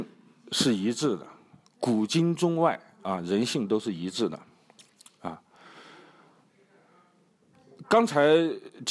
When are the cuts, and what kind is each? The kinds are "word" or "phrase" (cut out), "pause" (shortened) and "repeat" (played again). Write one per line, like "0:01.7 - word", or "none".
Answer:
none